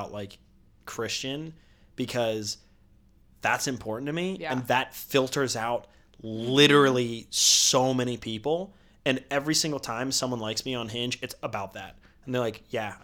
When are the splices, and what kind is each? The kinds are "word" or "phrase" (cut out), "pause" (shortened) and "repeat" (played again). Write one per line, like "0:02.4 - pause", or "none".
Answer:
none

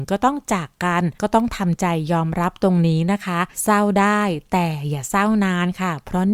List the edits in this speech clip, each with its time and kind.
0:01.2 - pause
0:03.5 - pause

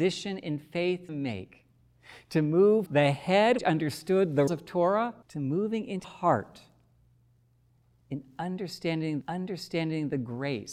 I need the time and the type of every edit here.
0:01.1 - word
0:02.9 - word
0:03.6 - word
0:04.5 - word
0:05.2 - pause
0:06.0 - word
0:09.2 - repeat

